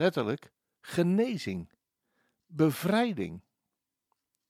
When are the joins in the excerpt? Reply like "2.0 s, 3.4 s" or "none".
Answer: none